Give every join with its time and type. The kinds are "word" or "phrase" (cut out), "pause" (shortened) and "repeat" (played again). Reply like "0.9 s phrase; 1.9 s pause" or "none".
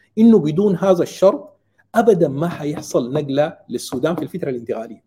none